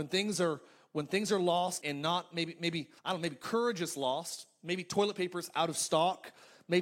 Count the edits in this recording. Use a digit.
2